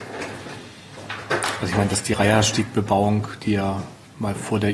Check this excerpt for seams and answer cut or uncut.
uncut